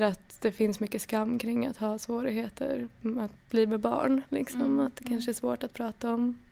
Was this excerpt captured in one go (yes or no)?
no